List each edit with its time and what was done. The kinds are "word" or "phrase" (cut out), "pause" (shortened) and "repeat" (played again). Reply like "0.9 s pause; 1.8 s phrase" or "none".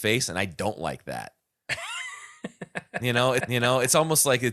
3.4 s repeat